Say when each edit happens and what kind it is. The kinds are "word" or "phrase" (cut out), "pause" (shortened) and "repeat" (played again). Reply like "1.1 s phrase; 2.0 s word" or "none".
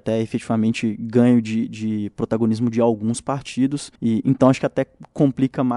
4.0 s pause